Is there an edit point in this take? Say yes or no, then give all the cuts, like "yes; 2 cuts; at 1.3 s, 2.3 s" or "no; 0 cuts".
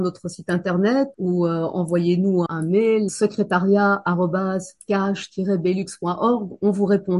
yes; 3 cuts; at 1.1 s, 2.5 s, 3.1 s